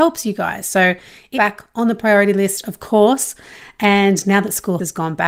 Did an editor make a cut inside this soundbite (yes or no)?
yes